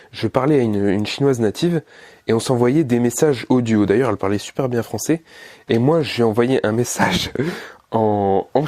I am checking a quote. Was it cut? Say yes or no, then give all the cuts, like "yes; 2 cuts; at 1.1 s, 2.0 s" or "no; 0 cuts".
no; 0 cuts